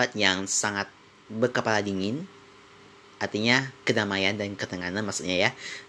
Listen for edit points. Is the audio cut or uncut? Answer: uncut